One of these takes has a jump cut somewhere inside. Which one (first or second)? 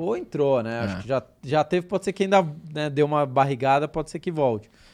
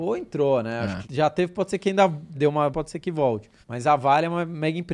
second